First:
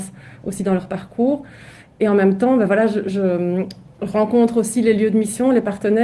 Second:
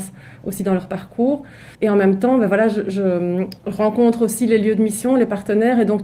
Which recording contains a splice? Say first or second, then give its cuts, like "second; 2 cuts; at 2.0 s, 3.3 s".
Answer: second; 2 cuts; at 1.7 s, 3.6 s